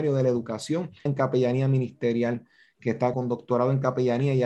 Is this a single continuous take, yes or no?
no